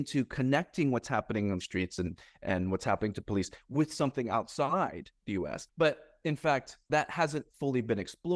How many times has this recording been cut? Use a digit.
3